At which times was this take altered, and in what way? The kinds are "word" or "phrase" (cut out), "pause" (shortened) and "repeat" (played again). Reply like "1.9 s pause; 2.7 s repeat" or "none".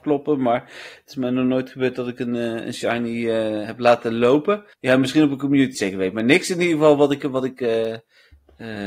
4.7 s pause; 5.7 s phrase